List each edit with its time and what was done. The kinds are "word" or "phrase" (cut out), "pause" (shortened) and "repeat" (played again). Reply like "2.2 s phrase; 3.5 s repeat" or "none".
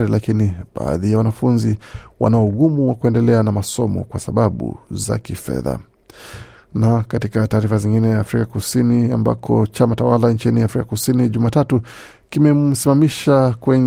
none